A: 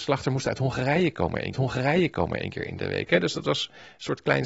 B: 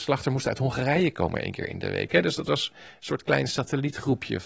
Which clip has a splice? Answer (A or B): A